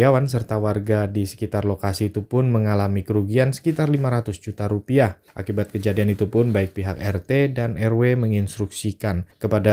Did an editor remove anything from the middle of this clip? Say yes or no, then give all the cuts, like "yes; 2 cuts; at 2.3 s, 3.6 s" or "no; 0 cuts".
no; 0 cuts